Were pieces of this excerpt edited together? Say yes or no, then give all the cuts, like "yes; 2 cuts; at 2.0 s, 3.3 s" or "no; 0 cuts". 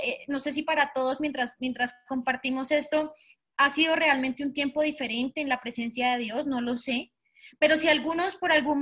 no; 0 cuts